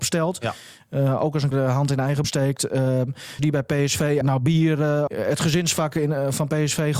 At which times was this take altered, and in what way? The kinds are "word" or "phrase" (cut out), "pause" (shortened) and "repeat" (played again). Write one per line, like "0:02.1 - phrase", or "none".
0:01.5 - word
0:02.2 - word
0:03.4 - word
0:04.2 - word
0:05.1 - word